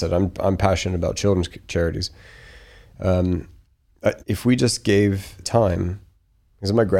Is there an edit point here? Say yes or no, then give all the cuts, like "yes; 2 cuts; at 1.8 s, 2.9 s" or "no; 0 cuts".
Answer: yes; 2 cuts; at 4.2 s, 5.4 s